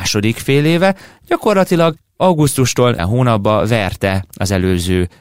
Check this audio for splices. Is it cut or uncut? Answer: cut